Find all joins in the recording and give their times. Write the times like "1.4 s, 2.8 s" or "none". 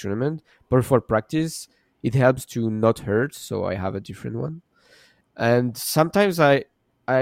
none